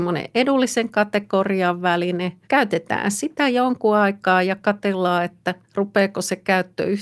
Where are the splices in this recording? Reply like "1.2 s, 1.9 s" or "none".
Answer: 2.4 s, 5.6 s